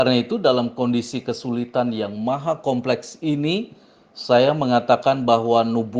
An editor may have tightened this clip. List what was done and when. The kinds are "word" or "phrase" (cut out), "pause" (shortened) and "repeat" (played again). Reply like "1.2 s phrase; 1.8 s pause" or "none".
none